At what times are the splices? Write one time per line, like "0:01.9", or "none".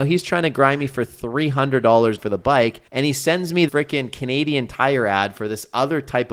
0:02.2
0:02.9
0:03.7